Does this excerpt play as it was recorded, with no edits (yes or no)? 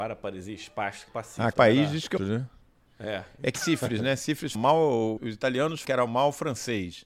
no